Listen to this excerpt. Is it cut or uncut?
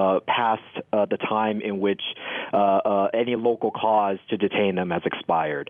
uncut